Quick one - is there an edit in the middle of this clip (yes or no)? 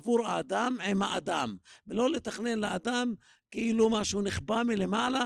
no